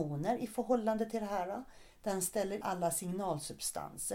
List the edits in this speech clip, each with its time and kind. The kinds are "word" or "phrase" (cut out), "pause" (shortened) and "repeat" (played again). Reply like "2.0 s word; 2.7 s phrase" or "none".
2.6 s word